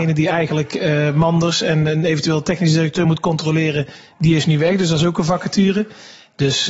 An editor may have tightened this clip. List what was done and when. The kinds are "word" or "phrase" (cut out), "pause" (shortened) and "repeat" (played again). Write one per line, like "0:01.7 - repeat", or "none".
none

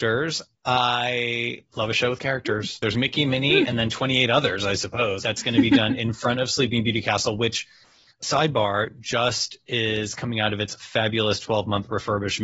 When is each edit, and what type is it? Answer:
none

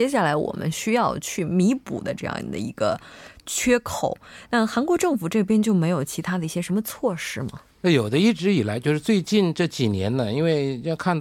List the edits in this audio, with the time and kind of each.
0:07.7 - pause

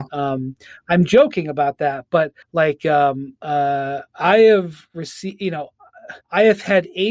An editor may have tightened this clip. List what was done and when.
0:02.4 - pause
0:03.4 - pause
0:06.2 - pause

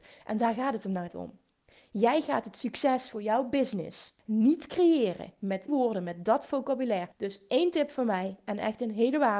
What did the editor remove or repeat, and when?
0:01.1 - word
0:04.2 - pause
0:05.7 - word
0:07.1 - pause

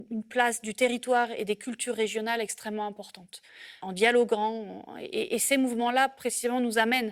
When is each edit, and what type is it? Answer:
none

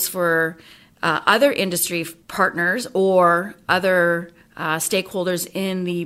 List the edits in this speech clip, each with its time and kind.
0:02.2 - pause

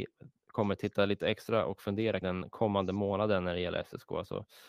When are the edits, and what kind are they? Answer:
0:02.2 - word

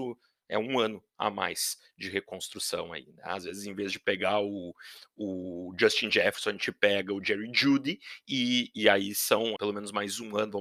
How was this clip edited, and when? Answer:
0:09.6 - word

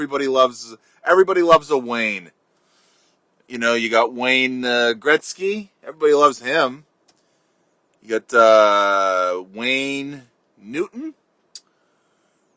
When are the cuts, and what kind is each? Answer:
none

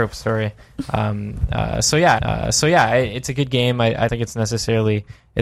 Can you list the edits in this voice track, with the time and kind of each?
0:02.2 - repeat
0:04.1 - word

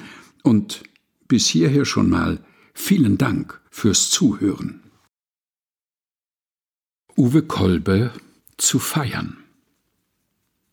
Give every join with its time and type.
0:03.7 - pause
0:08.4 - pause

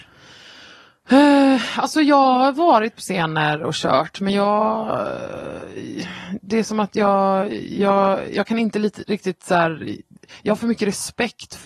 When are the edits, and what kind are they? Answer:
0:03.0 - phrase

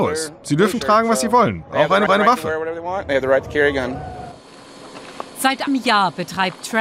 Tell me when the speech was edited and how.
0:02.1 - repeat
0:05.7 - word

